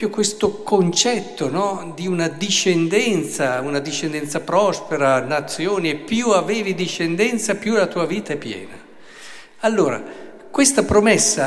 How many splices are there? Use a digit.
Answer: 0